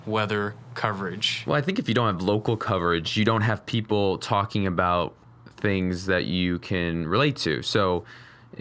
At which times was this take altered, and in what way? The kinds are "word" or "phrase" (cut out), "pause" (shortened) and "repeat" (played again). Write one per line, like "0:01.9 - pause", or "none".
none